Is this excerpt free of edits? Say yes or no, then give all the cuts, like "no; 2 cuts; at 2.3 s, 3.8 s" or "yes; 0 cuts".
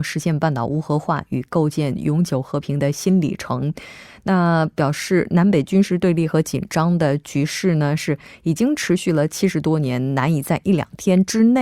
yes; 0 cuts